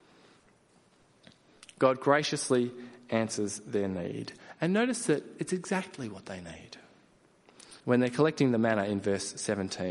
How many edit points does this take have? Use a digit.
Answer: 1